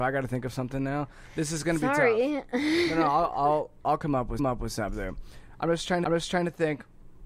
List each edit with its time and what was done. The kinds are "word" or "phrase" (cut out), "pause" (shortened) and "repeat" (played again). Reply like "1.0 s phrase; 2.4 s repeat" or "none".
4.4 s repeat; 6.0 s repeat